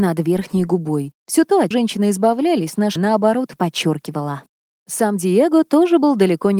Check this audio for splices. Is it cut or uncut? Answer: cut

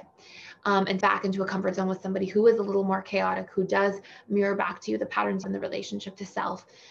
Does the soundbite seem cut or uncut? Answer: cut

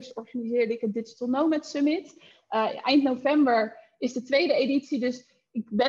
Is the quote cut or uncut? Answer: uncut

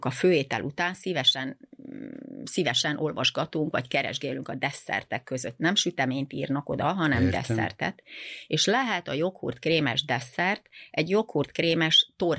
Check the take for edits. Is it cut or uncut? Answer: uncut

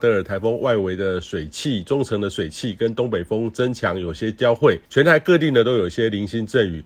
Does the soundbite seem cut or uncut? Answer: cut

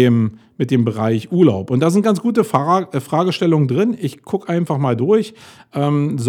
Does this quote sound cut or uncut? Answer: uncut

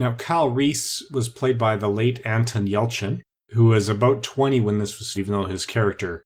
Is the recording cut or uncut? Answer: cut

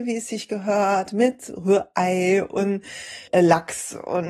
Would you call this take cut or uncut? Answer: cut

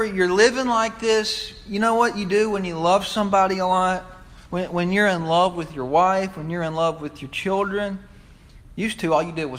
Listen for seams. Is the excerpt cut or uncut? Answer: cut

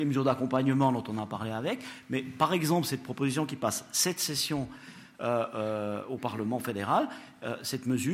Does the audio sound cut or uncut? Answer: uncut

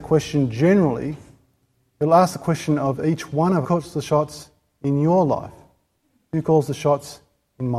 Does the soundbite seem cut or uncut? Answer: cut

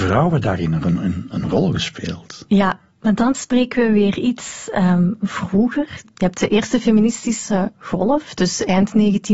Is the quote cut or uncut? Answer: uncut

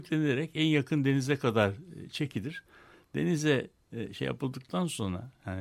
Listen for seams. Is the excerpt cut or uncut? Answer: uncut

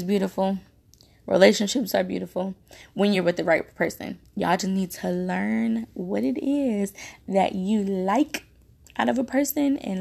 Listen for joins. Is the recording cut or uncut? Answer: uncut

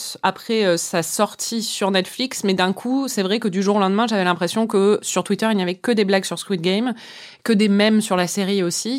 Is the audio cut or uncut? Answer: uncut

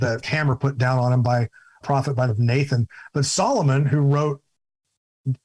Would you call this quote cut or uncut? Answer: cut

